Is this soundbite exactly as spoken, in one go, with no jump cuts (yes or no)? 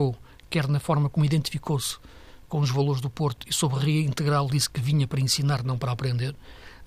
no